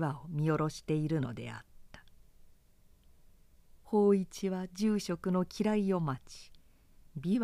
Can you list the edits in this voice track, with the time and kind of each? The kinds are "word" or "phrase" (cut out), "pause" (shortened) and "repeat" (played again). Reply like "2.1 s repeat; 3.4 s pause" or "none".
none